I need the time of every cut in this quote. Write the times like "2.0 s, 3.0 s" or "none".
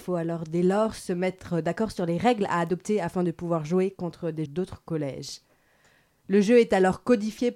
4.5 s